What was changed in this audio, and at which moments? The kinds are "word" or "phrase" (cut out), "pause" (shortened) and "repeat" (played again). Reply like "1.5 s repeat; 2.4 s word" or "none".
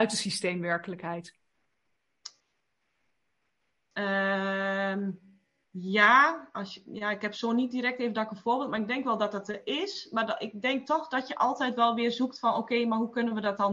none